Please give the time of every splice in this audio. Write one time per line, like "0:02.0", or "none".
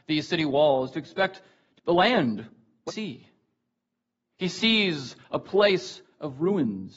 0:01.8
0:02.9

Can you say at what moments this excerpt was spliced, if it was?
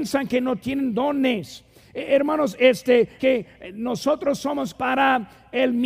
0:03.2
0:04.7

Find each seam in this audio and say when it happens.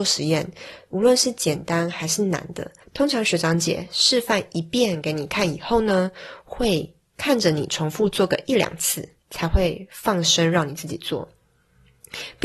0:02.8
0:09.2

